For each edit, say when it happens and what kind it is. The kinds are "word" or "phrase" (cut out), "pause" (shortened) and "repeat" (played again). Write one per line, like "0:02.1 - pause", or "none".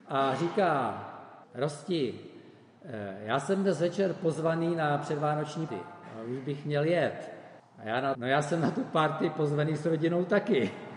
0:01.4 - pause
0:05.7 - word
0:07.6 - pause
0:08.1 - word